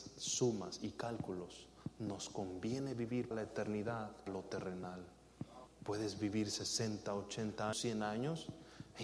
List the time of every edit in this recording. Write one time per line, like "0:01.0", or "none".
0:03.3
0:04.3
0:05.7
0:07.7